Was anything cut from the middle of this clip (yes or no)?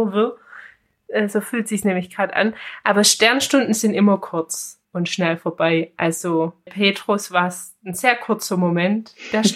yes